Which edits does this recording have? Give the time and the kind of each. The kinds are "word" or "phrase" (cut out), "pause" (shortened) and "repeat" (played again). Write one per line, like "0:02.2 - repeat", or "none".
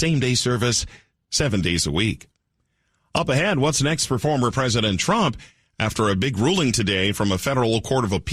none